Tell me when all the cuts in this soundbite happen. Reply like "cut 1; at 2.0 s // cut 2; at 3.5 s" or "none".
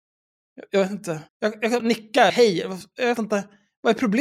cut 1; at 1.3 s // cut 2; at 1.8 s // cut 3; at 2.3 s // cut 4; at 3.2 s